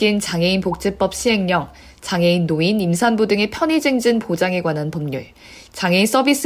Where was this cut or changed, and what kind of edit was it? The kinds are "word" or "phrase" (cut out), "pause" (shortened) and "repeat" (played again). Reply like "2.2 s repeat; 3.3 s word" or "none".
none